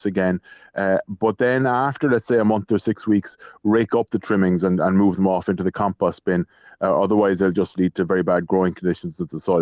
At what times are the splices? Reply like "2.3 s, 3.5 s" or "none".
none

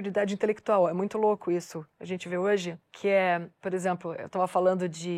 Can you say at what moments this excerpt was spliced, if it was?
2.8 s

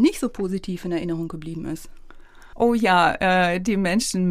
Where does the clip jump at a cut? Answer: none

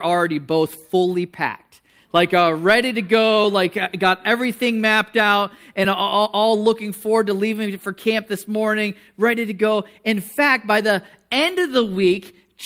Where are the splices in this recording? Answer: none

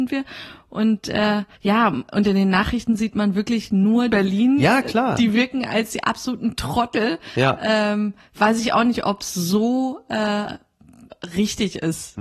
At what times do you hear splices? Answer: 1.5 s, 4.1 s

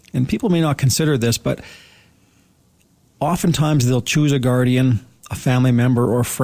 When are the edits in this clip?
none

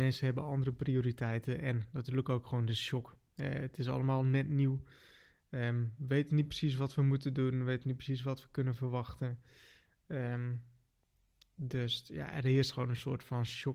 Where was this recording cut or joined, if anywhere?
none

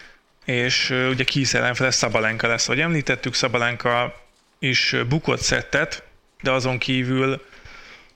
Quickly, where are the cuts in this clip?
none

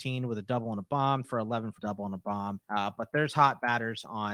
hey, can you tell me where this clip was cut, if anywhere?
1.2 s, 1.8 s, 2.6 s

